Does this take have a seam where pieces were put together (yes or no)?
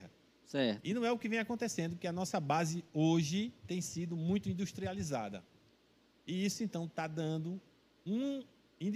no